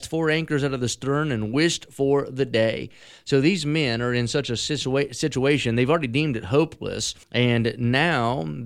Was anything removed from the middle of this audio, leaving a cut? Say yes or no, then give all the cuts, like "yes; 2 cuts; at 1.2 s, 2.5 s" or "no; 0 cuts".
yes; 1 cut; at 7.2 s